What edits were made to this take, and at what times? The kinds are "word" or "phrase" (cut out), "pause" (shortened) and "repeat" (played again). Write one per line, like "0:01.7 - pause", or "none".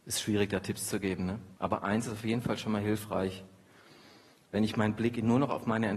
0:01.6 - pause